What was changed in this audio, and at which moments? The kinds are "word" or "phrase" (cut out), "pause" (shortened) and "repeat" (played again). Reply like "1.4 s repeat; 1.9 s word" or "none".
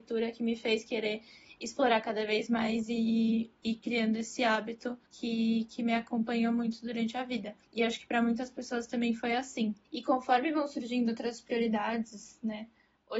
5.0 s pause; 7.6 s pause; 9.8 s pause